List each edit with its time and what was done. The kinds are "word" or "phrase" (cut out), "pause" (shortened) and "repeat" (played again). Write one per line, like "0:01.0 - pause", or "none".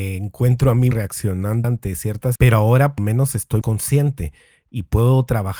0:00.9 - word
0:01.6 - word
0:02.4 - word
0:03.0 - word
0:03.6 - word